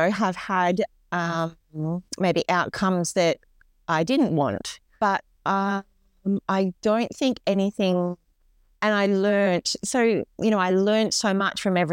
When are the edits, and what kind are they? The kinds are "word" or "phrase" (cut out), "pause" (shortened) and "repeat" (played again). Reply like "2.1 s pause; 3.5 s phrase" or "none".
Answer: none